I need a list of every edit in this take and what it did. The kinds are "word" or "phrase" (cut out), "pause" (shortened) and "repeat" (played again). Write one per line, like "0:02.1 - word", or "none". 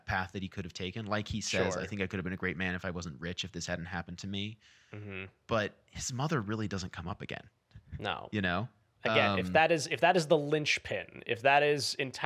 none